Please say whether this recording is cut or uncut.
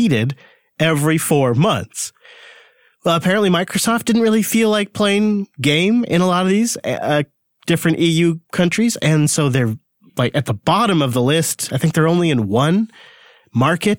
uncut